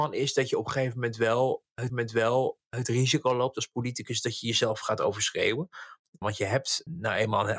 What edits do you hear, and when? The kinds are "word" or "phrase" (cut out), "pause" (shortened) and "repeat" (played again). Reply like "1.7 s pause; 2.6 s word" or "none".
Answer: 1.9 s repeat

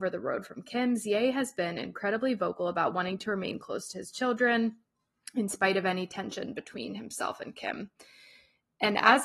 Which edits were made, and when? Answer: none

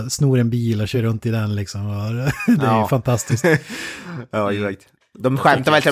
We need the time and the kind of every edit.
none

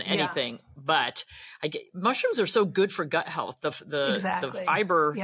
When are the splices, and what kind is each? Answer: none

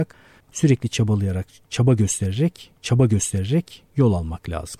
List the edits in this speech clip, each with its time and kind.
2.8 s repeat

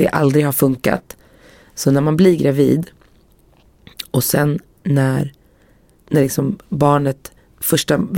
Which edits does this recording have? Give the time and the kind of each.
6.0 s word

